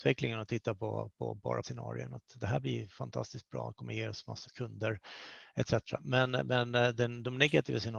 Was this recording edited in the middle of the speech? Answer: yes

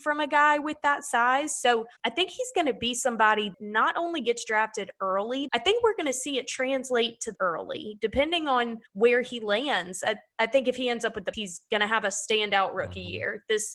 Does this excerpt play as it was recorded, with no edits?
no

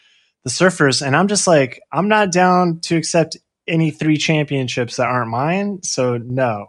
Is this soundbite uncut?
yes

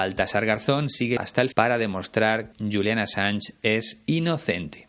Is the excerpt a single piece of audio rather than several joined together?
no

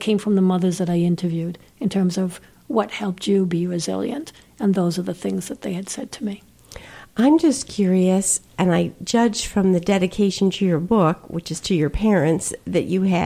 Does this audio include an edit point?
no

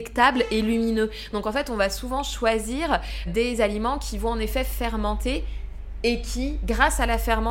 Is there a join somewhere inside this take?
yes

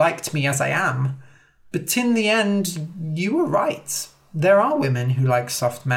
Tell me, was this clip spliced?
no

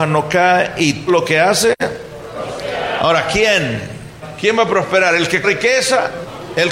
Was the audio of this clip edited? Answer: yes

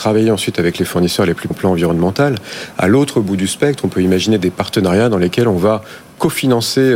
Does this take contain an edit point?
yes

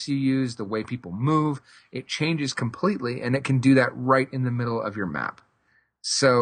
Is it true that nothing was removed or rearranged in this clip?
yes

